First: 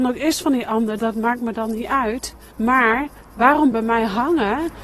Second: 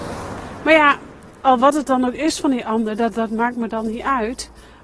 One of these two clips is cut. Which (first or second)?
first